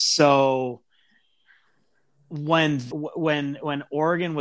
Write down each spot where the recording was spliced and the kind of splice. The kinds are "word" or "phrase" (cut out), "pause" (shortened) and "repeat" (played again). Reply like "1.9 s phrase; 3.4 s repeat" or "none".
2.9 s word